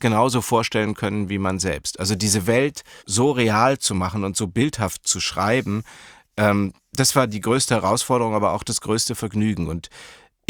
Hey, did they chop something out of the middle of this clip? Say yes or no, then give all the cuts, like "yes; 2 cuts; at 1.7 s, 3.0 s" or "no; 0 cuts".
yes; 1 cut; at 3.0 s